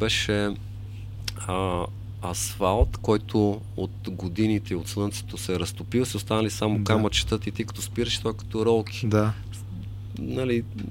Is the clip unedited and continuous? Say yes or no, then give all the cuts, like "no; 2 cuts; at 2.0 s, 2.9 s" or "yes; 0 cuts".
yes; 0 cuts